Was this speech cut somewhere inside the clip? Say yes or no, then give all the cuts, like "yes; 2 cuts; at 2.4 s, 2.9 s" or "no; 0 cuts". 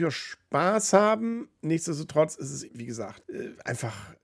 yes; 2 cuts; at 2.7 s, 3.2 s